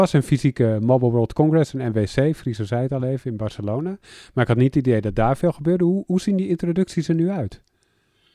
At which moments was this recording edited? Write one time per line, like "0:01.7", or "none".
none